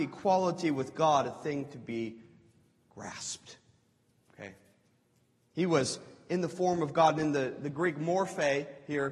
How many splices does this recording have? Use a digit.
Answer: 0